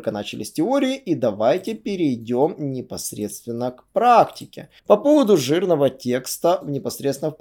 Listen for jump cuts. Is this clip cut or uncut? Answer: cut